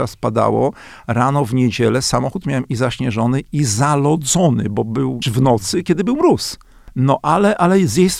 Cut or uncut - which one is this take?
cut